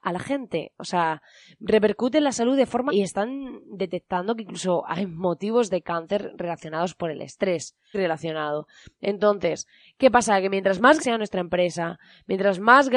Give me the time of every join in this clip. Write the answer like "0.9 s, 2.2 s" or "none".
2.9 s, 7.9 s, 11.0 s

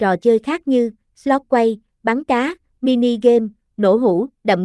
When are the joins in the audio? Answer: none

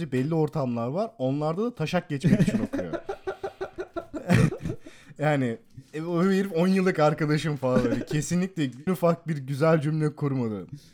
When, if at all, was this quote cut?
8.9 s

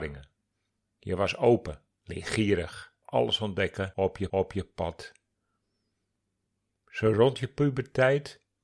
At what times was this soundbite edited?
3.0 s, 4.3 s

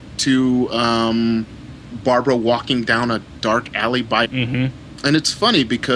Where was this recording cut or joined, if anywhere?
1.9 s, 4.3 s

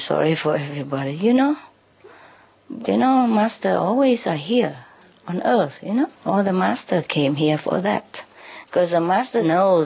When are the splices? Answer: 6.2 s

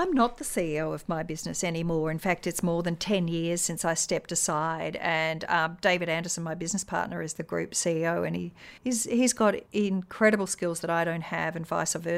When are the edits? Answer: 8.8 s, 9.7 s

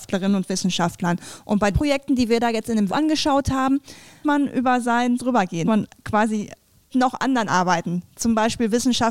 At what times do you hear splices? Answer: 1.7 s, 2.9 s, 4.2 s, 5.2 s, 5.7 s, 6.9 s, 7.5 s

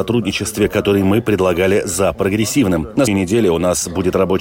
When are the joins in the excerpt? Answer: 3.1 s

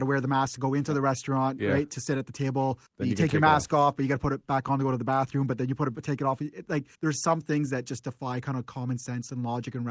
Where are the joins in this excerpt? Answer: 2.9 s, 6.9 s

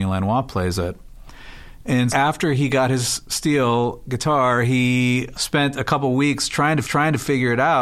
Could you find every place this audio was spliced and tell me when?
2.1 s, 5.3 s, 6.8 s

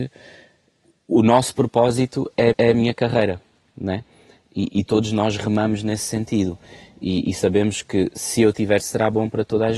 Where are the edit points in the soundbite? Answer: 2.5 s, 8.8 s

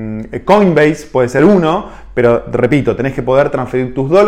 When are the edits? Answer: none

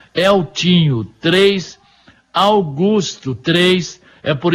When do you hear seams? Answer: none

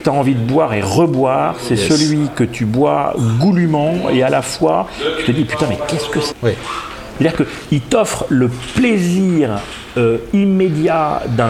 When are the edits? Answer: 6.3 s

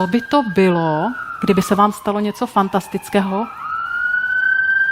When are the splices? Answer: none

